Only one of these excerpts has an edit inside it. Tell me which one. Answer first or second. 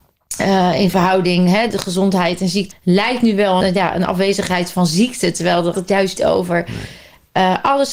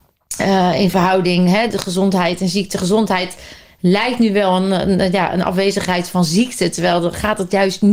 first